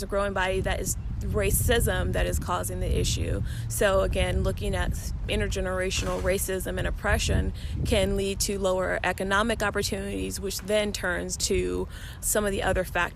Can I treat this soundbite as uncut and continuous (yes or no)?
no